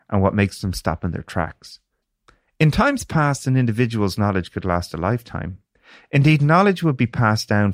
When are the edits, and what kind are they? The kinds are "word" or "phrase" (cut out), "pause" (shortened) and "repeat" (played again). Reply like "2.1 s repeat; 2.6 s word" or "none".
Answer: none